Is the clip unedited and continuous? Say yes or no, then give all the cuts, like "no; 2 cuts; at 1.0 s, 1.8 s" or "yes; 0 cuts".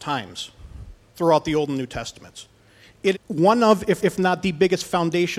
no; 3 cuts; at 1.1 s, 3.1 s, 4.0 s